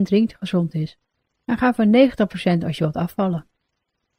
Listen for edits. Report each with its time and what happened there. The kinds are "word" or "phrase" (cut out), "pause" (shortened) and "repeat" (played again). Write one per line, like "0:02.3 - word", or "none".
none